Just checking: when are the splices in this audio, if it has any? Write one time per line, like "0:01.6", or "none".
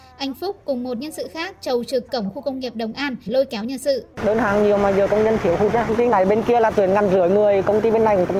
0:03.3
0:04.1